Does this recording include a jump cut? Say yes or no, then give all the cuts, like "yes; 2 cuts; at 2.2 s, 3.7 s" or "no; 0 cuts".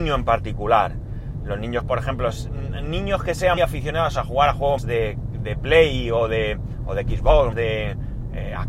yes; 4 cuts; at 1.8 s, 3.6 s, 4.8 s, 7.5 s